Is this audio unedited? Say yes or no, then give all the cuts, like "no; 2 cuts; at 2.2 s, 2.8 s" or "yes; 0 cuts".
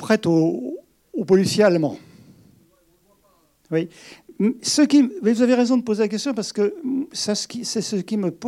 yes; 0 cuts